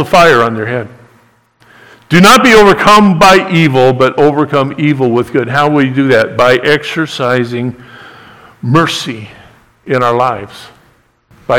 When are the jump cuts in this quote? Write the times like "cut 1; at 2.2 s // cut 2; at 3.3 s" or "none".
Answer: none